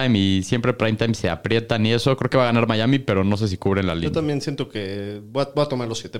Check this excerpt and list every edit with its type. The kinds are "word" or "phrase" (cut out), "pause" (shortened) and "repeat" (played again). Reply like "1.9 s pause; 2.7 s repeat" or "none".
none

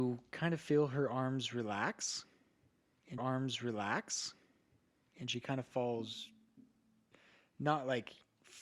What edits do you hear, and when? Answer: 3.2 s repeat

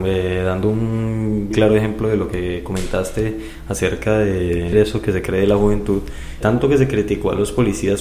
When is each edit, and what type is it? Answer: 1.5 s word; 4.7 s word; 6.4 s word

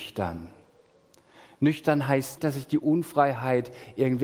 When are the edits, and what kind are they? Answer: 2.4 s word

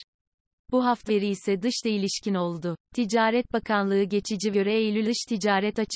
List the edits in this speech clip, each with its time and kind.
1.1 s phrase; 1.8 s word; 2.9 s pause; 4.5 s word; 5.0 s word

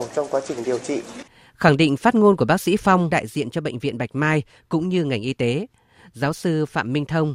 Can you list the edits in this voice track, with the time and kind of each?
3.1 s word

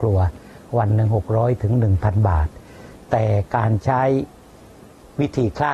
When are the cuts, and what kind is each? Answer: none

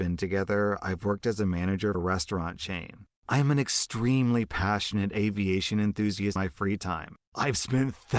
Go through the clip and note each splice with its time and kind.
1.9 s word; 6.4 s word

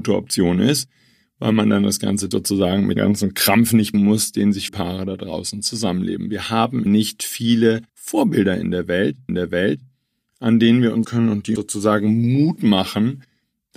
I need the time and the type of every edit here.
2.3 s phrase; 3.0 s word; 3.9 s word; 4.7 s word; 6.9 s word; 7.9 s pause; 9.3 s repeat; 11.0 s word; 11.6 s word

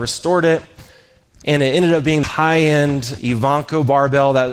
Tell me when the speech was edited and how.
2.2 s word

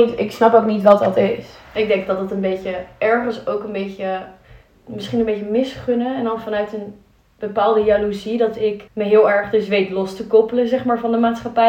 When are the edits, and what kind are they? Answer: 8.9 s pause

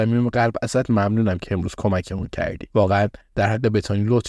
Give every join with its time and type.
2.7 s pause

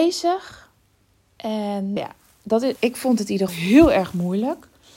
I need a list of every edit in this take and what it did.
2.0 s word; 2.8 s word; 3.5 s word

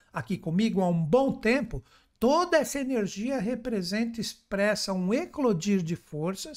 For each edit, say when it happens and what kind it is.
none

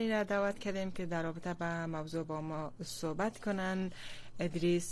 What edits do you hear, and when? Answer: none

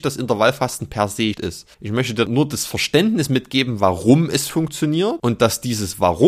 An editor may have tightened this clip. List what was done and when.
1.3 s word; 1.7 s pause; 2.3 s word; 4.5 s phrase

